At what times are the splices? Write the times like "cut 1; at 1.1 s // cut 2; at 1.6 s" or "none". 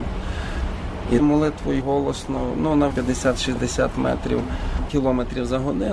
cut 1; at 1.2 s // cut 2; at 1.8 s // cut 3; at 2.9 s // cut 4; at 4.9 s